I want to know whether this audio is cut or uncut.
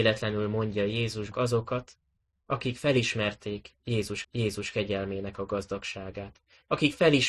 cut